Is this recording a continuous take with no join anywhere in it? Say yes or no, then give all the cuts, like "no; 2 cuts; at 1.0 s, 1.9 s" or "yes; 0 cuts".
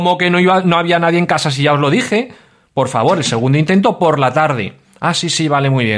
yes; 0 cuts